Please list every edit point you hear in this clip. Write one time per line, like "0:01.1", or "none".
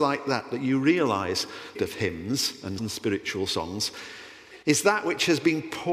0:01.7
0:02.8
0:04.6